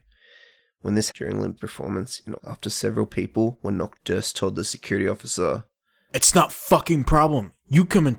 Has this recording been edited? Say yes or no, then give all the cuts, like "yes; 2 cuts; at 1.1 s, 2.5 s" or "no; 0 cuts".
yes; 5 cuts; at 1.1 s, 1.6 s, 2.4 s, 4.0 s, 6.5 s